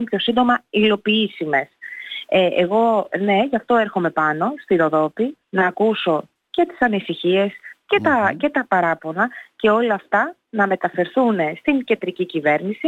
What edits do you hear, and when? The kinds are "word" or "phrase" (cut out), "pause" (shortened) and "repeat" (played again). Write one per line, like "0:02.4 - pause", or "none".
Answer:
0:05.5 - pause